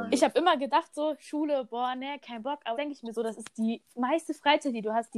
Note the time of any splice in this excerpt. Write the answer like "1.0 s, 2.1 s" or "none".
2.7 s